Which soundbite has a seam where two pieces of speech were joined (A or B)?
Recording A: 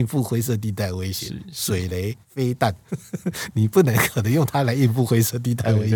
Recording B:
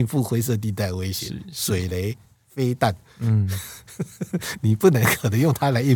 A